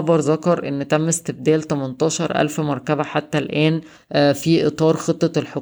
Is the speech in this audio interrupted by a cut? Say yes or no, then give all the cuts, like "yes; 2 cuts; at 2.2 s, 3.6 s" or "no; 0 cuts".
yes; 1 cut; at 4.0 s